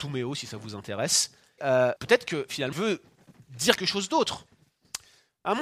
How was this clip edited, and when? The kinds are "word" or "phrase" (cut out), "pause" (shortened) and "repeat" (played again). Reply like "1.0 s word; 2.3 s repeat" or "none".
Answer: 1.6 s word; 2.0 s word; 2.7 s word; 3.8 s word